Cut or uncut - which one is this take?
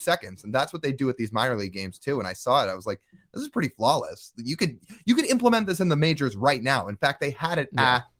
uncut